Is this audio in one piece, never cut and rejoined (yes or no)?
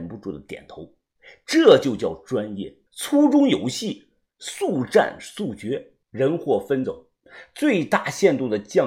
no